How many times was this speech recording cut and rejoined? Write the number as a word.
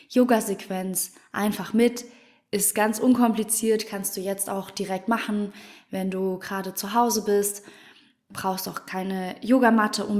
zero